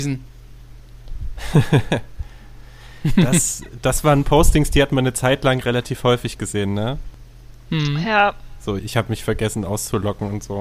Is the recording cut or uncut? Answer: cut